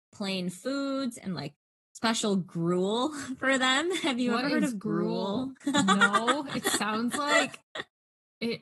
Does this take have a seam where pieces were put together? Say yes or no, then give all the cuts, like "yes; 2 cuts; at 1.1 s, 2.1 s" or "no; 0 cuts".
no; 0 cuts